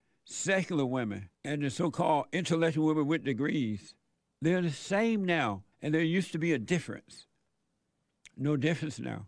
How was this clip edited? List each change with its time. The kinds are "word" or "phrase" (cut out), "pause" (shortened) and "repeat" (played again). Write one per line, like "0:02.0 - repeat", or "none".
0:01.3 - pause
0:04.1 - pause
0:05.7 - pause